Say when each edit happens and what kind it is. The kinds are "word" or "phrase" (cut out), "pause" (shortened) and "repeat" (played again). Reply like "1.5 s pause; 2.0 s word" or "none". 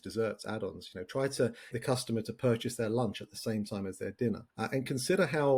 1.7 s word; 4.5 s pause